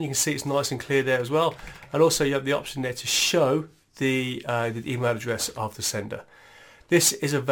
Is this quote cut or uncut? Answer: uncut